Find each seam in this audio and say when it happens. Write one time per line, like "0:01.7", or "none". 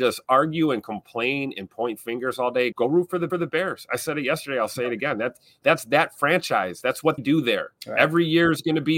0:02.7
0:03.3
0:07.2
0:07.8

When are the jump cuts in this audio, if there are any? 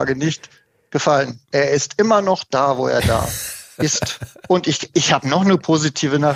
0:01.4

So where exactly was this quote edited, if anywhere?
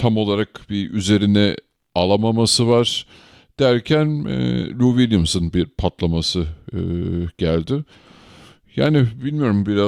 none

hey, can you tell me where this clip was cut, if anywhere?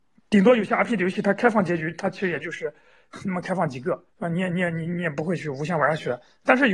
0:04.1

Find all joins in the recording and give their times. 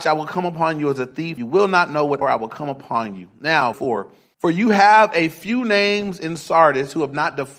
0:01.4
0:02.2
0:03.7

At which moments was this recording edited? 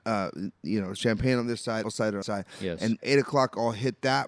0:01.8
0:02.2
0:03.0

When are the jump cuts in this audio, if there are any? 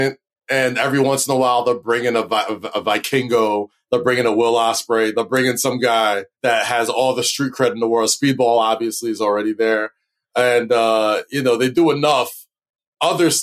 0:06.3

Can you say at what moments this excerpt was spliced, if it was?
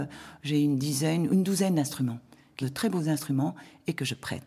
0:02.6

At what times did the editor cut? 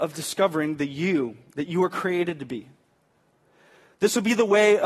none

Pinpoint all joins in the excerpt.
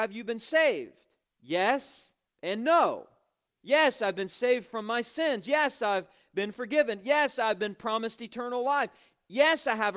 none

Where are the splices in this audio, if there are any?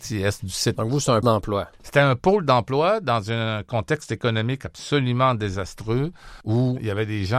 0:01.2
0:06.4

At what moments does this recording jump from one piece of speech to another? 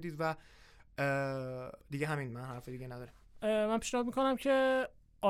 0:01.8

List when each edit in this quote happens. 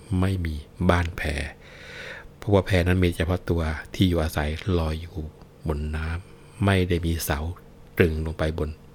0:07.9

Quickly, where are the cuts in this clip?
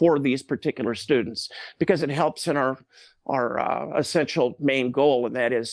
none

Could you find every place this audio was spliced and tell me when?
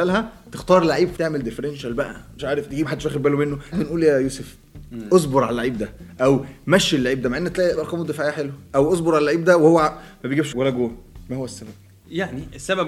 0:01.2
0:02.4
0:02.8
0:03.7
0:07.7
0:10.5

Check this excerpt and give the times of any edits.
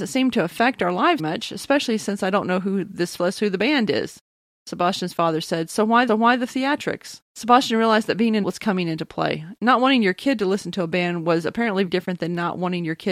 0:01.2
0:03.2
0:06.1
0:07.3
0:08.4
0:11.9

